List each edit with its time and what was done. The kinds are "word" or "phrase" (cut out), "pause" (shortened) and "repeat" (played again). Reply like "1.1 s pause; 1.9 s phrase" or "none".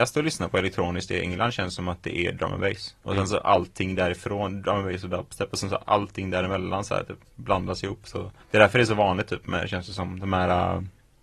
3.0 s pause; 8.4 s pause

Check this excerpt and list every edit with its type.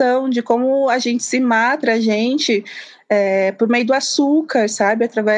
1.8 s word

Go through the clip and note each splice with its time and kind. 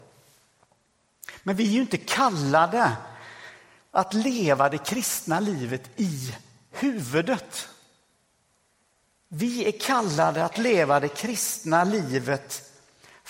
none

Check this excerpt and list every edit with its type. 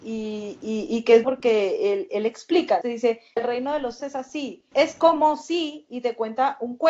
1.2 s word; 2.8 s word; 3.4 s word; 4.0 s word; 4.7 s word

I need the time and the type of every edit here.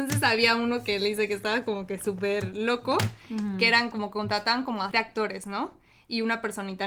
4.9 s phrase

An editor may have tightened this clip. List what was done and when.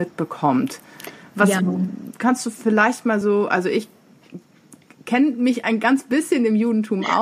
none

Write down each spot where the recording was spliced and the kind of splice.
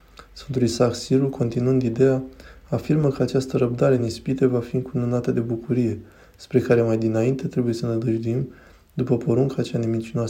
none

